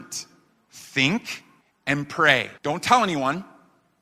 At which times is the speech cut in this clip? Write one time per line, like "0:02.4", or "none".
0:01.6
0:02.6